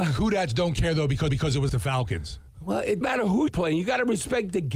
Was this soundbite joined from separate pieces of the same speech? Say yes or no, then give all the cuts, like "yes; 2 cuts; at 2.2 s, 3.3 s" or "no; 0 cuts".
yes; 4 cuts; at 1.3 s, 1.7 s, 3.0 s, 3.5 s